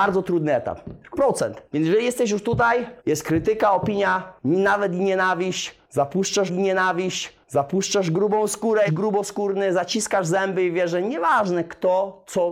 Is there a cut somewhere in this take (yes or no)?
yes